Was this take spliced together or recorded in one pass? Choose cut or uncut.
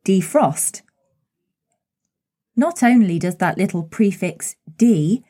uncut